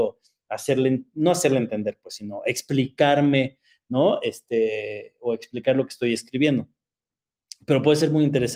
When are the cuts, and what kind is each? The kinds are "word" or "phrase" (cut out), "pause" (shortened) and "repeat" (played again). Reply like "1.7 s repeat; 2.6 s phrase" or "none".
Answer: none